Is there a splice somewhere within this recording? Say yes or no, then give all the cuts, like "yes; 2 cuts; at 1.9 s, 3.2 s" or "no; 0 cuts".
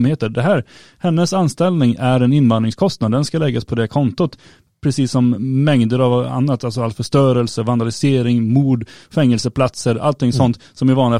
no; 0 cuts